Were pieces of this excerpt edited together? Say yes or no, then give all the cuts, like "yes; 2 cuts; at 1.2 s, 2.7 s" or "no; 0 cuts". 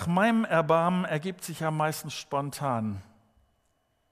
no; 0 cuts